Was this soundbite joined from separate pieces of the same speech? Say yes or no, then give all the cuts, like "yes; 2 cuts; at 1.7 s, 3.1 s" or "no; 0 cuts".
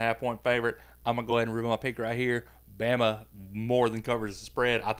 no; 0 cuts